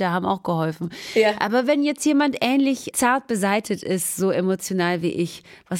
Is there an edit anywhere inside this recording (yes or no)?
yes